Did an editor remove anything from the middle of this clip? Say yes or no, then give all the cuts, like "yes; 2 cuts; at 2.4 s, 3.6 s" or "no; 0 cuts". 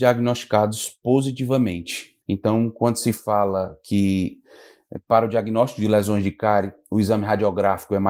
yes; 1 cut; at 2.2 s